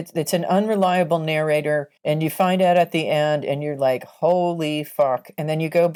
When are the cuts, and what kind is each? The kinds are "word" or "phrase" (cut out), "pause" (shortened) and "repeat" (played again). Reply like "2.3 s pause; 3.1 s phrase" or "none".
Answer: 2.0 s pause